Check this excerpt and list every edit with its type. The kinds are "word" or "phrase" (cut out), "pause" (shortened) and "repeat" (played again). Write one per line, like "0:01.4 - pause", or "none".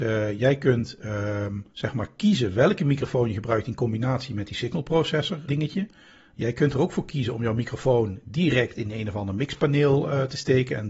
0:01.7 - pause
0:05.5 - word